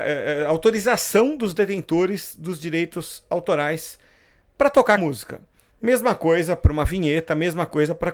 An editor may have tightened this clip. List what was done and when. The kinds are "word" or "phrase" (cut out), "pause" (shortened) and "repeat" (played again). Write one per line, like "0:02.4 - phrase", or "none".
0:05.0 - word